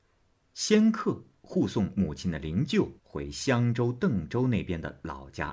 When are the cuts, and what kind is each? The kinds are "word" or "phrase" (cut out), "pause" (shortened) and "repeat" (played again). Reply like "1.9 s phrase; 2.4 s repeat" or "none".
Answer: 3.0 s pause